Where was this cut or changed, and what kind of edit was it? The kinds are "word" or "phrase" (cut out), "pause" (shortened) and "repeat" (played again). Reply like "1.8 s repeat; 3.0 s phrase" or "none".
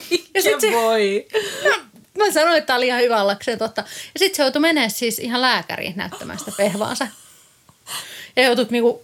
none